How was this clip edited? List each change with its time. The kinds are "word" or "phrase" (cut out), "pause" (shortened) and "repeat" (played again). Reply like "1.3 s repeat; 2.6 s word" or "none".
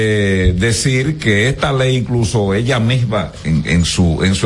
3.4 s word